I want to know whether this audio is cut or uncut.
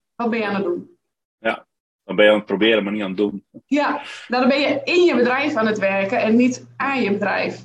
uncut